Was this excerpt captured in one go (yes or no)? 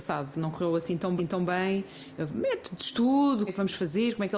no